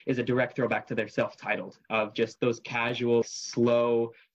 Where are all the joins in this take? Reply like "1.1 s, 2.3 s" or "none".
2.4 s, 3.2 s